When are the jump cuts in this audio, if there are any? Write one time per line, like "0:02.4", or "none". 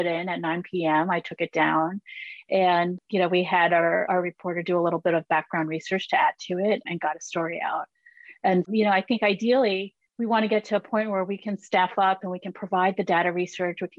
0:10.1